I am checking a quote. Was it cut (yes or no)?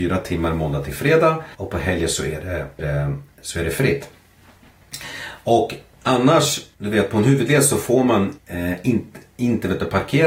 yes